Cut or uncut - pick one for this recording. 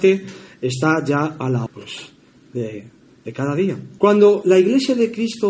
cut